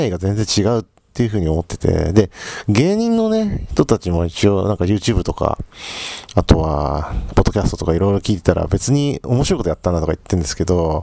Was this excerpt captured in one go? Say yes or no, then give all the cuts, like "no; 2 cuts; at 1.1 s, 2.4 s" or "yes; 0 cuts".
yes; 0 cuts